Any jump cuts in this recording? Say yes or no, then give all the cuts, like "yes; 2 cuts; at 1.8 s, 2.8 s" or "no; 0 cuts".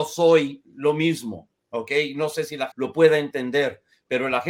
yes; 1 cut; at 2.7 s